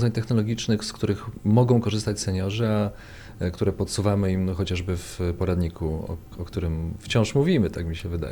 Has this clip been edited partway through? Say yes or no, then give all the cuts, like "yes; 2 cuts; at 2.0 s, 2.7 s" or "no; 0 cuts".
no; 0 cuts